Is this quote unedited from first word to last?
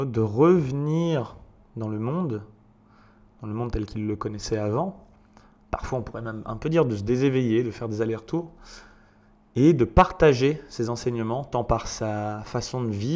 yes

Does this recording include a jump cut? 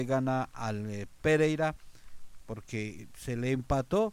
no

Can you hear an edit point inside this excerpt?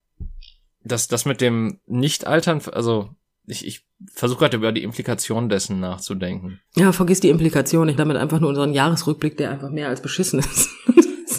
yes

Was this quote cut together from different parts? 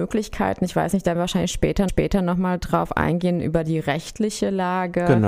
yes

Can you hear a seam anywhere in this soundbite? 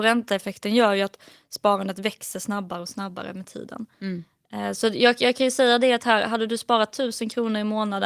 no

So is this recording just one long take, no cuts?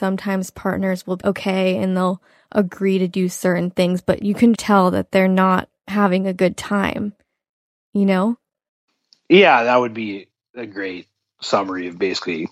no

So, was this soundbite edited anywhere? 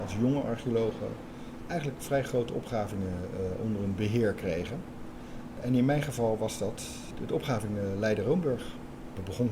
no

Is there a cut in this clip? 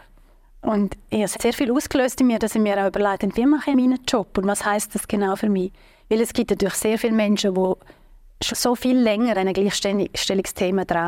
yes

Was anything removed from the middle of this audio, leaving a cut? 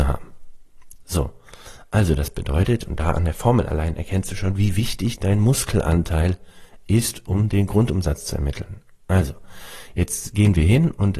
no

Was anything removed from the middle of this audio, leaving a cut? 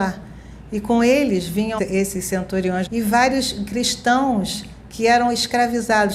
yes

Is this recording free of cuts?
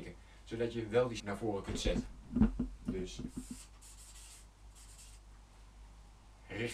no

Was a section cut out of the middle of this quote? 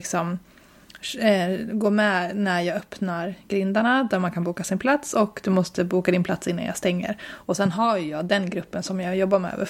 no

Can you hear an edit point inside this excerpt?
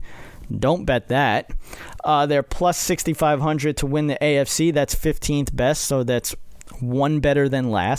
no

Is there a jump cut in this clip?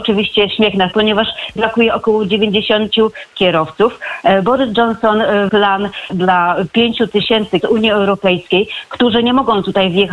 yes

